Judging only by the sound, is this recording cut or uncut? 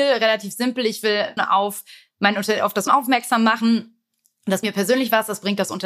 cut